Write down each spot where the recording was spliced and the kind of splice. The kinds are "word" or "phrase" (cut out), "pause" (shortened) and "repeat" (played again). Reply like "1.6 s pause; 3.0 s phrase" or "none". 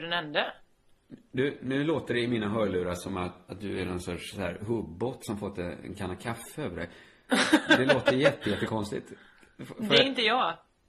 none